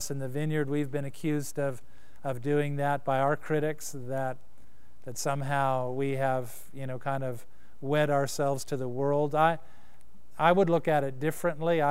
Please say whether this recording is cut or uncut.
uncut